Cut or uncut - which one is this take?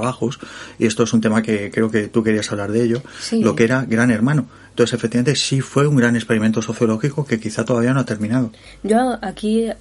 uncut